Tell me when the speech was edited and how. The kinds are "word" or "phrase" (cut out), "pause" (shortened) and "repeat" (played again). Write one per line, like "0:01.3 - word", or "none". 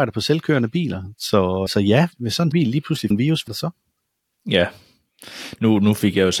0:01.7 - word
0:02.1 - word
0:02.5 - word
0:03.1 - word
0:03.5 - word